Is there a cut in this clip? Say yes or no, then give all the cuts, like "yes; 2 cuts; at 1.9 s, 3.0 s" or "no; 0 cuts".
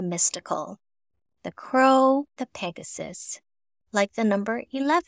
yes; 1 cut; at 2.4 s